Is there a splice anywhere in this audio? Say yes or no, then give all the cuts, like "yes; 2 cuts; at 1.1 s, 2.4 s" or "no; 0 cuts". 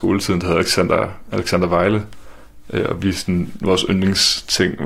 no; 0 cuts